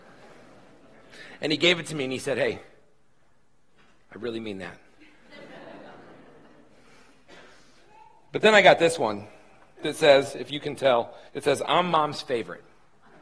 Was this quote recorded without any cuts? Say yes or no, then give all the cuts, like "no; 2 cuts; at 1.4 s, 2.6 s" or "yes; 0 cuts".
no; 1 cut; at 11.3 s